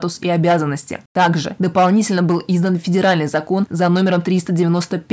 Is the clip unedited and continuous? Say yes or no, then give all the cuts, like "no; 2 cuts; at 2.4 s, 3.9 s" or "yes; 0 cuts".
yes; 0 cuts